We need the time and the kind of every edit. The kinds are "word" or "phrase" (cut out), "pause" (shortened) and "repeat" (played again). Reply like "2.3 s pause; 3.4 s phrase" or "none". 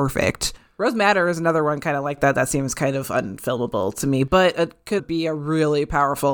5.0 s word